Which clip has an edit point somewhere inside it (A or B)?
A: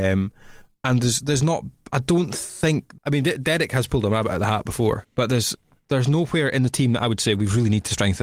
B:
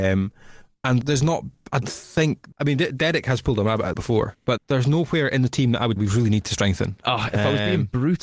B